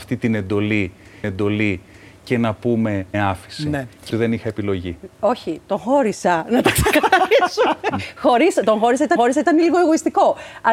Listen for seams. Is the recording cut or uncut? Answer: cut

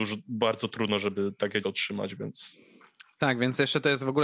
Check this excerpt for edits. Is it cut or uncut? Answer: cut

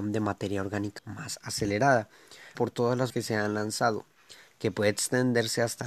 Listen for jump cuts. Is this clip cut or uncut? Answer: cut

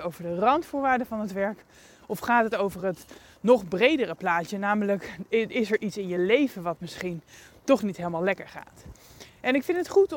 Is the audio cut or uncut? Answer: uncut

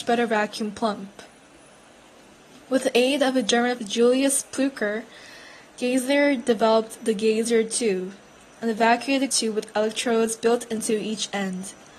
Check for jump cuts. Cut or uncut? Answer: cut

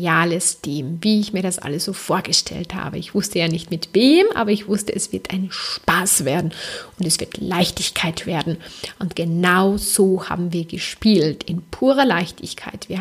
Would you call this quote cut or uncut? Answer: uncut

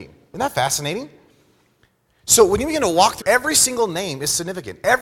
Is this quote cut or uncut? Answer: cut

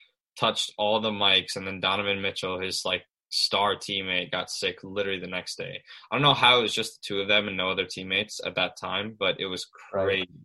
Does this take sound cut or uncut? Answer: uncut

